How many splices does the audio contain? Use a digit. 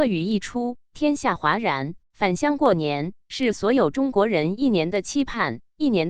1